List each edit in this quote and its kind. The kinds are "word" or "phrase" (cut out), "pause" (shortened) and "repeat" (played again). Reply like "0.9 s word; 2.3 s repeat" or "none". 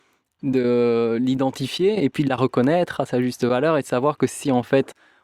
none

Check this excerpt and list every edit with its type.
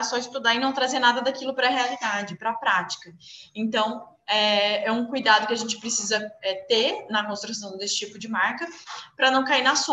none

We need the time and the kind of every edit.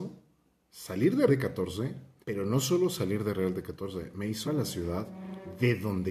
1.3 s word; 2.2 s pause; 4.4 s word

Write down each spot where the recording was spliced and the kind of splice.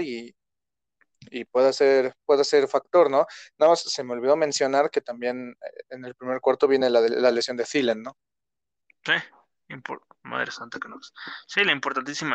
none

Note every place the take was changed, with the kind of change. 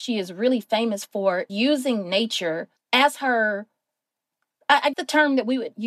1.5 s word; 2.8 s pause; 4.9 s word

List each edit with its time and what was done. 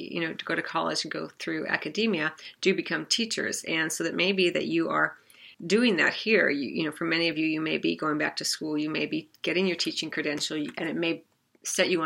5.5 s pause

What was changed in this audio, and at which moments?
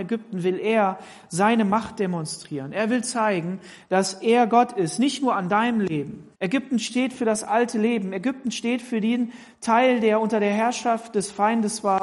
6.4 s pause

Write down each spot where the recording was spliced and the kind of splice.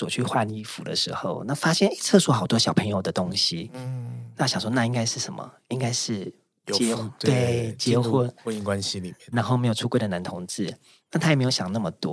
9.3 s word

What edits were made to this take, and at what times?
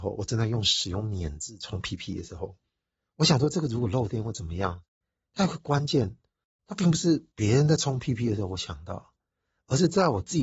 7.3 s pause

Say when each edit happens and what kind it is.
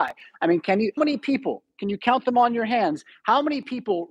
1.0 s word

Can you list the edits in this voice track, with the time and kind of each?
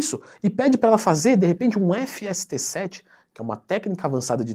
none

